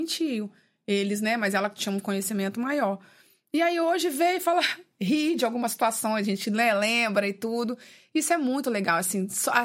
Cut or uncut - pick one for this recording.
uncut